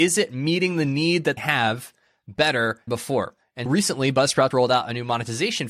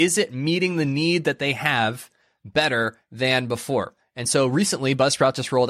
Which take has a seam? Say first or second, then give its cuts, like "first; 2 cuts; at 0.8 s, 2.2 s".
first; 4 cuts; at 1.4 s, 2.9 s, 3.7 s, 4.5 s